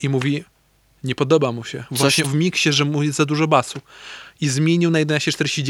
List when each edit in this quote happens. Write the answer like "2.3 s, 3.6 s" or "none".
2.2 s